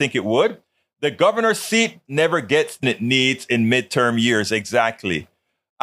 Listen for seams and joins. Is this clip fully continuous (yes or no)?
no